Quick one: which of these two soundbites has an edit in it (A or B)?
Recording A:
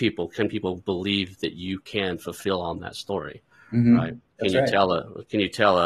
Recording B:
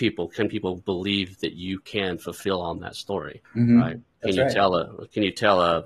B